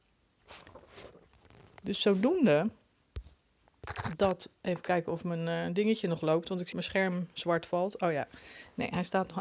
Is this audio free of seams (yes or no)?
no